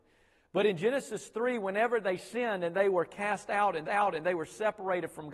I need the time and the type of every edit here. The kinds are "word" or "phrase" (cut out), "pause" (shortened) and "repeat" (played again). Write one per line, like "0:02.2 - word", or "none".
0:03.8 - repeat